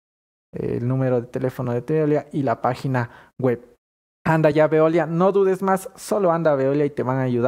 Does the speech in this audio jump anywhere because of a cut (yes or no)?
no